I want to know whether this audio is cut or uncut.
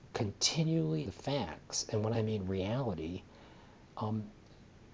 cut